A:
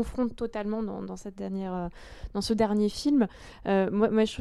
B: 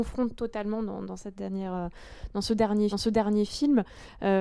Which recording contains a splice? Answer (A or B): B